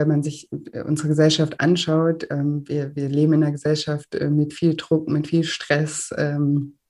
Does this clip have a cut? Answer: no; 0 cuts

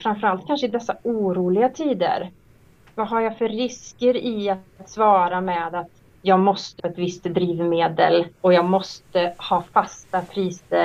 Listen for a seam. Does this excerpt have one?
yes; 1 cut; at 6.8 s

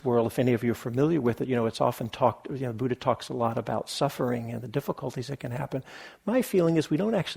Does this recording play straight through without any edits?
yes; 0 cuts

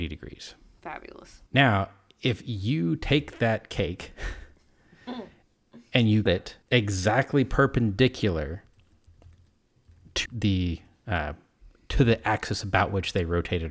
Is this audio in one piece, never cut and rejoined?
no; 4 cuts; at 1.5 s, 6.3 s, 6.6 s, 10.3 s

